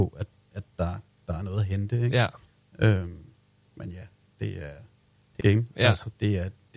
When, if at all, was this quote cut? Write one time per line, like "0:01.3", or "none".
0:05.4